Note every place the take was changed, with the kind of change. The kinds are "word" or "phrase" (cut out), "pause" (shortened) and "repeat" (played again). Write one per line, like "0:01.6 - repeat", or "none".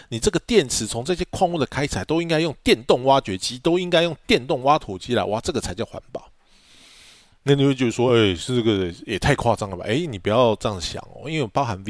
none